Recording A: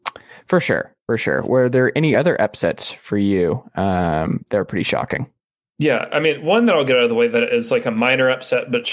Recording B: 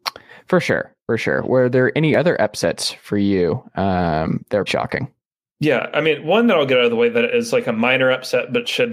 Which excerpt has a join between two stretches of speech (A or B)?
B